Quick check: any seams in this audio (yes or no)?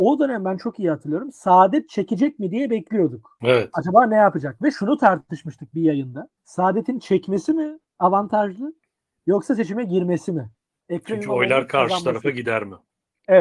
no